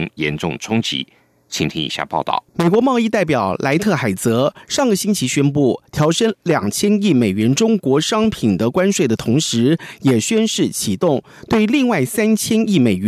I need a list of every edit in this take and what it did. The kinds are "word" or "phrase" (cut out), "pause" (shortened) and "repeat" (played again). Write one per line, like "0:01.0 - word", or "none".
0:02.5 - pause